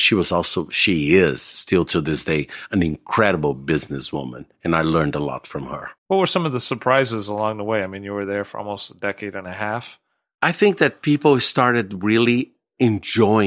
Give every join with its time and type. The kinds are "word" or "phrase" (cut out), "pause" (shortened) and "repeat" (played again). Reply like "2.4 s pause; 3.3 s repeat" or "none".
6.0 s pause